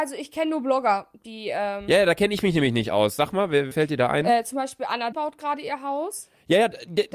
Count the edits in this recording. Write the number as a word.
two